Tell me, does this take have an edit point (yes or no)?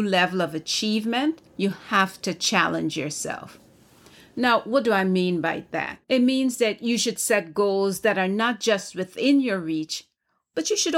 yes